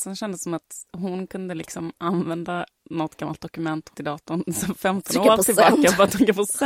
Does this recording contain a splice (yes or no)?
yes